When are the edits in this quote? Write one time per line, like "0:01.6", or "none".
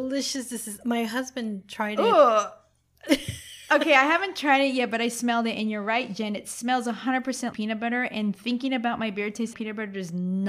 0:07.5
0:09.5